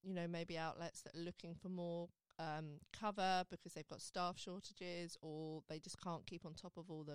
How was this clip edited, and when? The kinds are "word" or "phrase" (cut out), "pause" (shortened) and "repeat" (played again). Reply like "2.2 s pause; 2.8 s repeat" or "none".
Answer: none